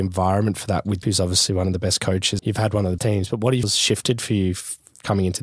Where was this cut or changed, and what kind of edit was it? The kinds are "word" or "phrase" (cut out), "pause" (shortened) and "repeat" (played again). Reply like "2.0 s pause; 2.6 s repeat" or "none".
1.0 s word; 2.4 s word; 3.0 s word; 3.6 s word